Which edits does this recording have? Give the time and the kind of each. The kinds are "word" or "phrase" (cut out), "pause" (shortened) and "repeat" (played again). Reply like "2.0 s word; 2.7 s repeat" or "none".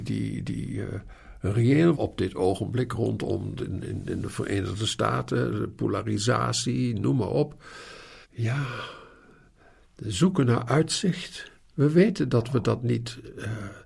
1.9 s word; 3.6 s phrase; 8.2 s pause